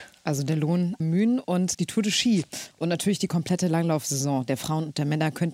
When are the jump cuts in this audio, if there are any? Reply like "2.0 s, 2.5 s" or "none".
1.0 s, 1.7 s